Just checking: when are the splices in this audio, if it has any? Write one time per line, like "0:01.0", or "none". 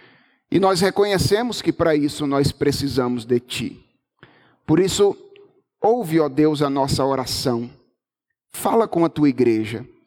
none